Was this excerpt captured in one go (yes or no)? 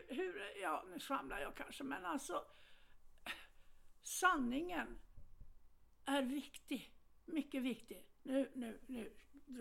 yes